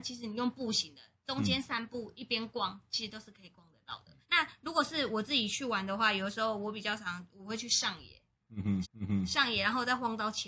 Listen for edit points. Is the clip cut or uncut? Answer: cut